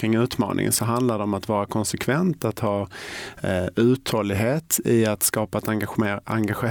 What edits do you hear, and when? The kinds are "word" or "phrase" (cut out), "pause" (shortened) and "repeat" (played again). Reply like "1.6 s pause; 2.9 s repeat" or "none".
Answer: none